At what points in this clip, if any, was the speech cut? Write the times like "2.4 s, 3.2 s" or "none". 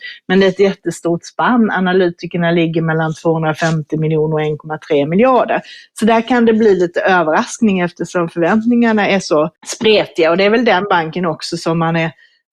9.6 s

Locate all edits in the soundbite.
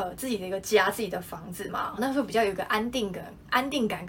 2.0 s

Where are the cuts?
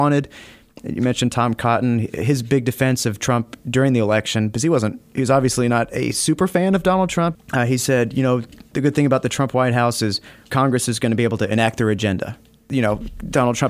none

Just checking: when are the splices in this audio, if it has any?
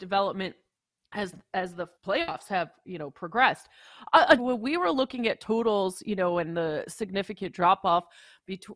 1.9 s, 4.4 s

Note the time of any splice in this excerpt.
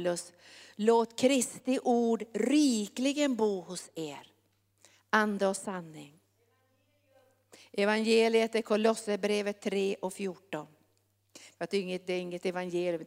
none

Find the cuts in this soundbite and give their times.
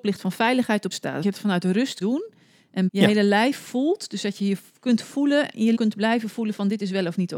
0.9 s, 1.2 s, 2.0 s, 2.9 s, 5.7 s

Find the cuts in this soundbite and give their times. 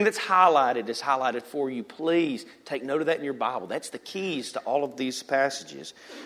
none

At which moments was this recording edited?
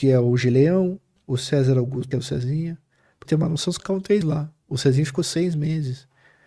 1.2 s, 2.1 s, 3.2 s, 3.8 s, 4.2 s

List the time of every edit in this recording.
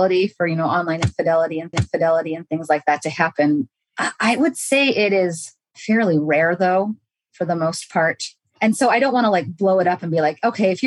1.7 s

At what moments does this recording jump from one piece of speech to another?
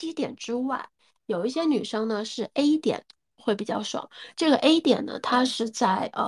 none

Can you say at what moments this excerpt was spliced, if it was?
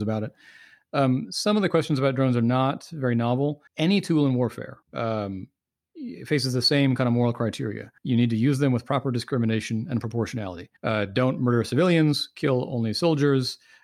3.7 s, 4.8 s, 8.0 s, 10.8 s

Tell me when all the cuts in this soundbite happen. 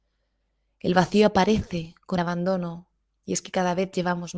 2.2 s

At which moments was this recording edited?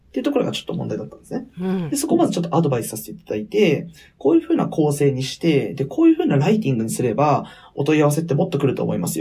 none

